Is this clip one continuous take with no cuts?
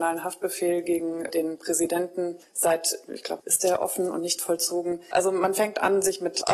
no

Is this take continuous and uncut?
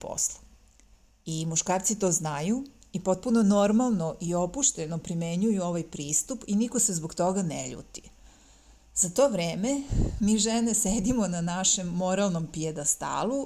yes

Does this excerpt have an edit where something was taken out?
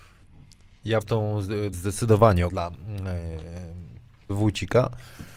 yes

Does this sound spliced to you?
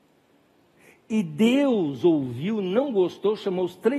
no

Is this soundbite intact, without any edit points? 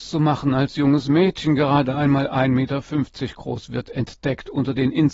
yes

